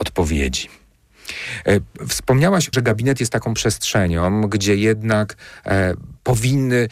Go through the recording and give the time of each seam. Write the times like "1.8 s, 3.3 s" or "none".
2.7 s